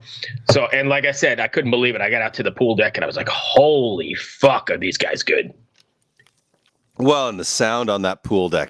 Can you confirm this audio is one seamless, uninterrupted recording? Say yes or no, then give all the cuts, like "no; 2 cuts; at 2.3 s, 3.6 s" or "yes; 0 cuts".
yes; 0 cuts